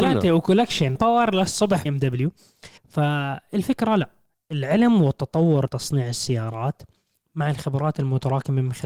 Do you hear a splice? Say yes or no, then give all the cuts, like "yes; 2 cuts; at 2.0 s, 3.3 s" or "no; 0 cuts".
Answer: yes; 5 cuts; at 1.0 s, 1.9 s, 2.8 s, 4.3 s, 5.7 s